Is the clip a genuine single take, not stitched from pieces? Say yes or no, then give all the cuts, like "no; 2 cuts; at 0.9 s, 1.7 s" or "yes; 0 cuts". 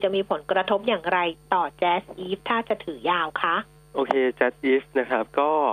no; 1 cut; at 3.8 s